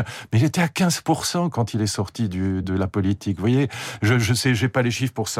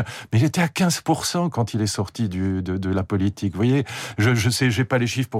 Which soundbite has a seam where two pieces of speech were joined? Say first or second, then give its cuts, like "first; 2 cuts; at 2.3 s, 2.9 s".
first; 1 cut; at 2.6 s